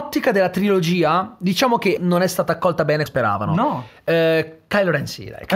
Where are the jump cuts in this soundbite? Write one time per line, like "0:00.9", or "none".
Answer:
0:02.0
0:03.1